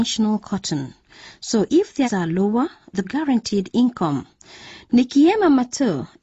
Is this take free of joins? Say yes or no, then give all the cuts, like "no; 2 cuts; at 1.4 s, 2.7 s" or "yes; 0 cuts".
no; 3 cuts; at 1.7 s, 2.0 s, 3.0 s